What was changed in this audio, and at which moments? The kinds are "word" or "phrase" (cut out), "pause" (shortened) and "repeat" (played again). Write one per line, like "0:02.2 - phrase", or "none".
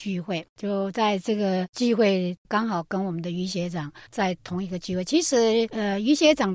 0:04.1 - pause